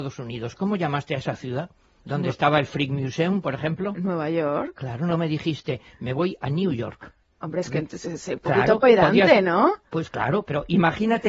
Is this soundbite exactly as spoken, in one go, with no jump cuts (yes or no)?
yes